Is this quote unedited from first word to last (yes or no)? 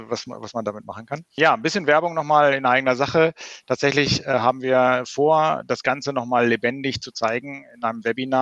yes